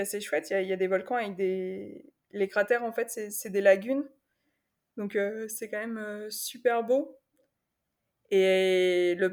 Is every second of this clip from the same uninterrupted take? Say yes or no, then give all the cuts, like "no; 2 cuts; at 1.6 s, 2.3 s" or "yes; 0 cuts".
yes; 0 cuts